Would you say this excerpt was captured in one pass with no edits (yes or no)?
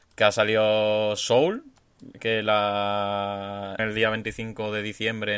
no